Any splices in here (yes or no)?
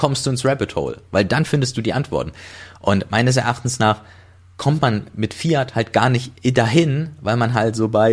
no